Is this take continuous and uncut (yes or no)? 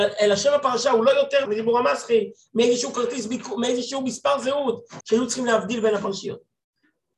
no